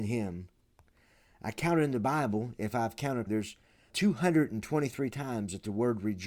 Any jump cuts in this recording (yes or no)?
yes